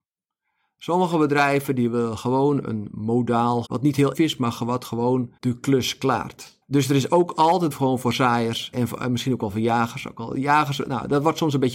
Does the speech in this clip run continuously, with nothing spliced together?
no; 6 cuts; at 3.7 s, 4.1 s, 5.4 s, 6.6 s, 7.7 s, 8.7 s

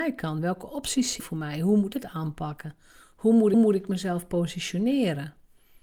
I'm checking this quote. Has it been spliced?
yes; 3 cuts; at 1.2 s, 1.9 s, 3.5 s

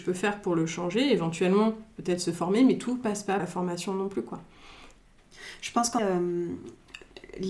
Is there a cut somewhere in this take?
yes; 2 cuts; at 3.4 s, 6.0 s

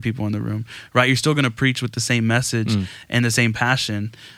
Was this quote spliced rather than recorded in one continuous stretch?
no; 0 cuts

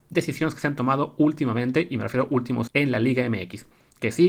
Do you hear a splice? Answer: yes; 1 cut; at 2.7 s

